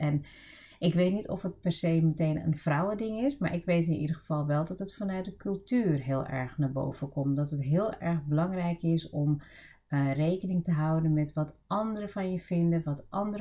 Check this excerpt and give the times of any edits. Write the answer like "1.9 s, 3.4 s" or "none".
none